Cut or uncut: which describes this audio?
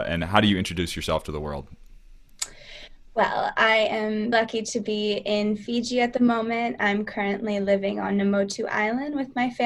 cut